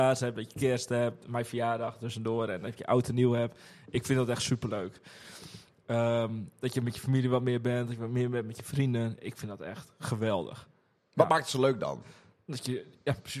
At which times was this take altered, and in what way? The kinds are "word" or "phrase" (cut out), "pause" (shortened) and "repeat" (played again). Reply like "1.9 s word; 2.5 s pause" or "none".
none